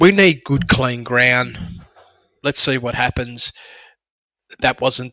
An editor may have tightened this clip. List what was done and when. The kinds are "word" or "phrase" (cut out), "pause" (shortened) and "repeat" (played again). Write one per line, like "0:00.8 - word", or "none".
none